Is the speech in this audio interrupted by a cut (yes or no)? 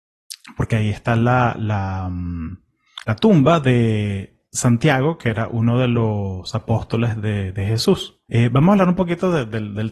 yes